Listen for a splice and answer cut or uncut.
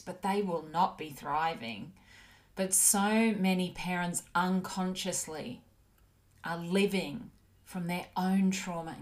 uncut